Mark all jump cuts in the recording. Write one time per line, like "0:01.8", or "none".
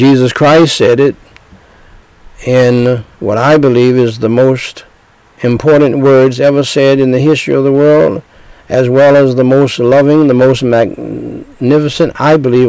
none